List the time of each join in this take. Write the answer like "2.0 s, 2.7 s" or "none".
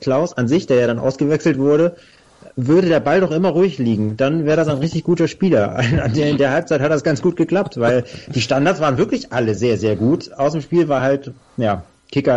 none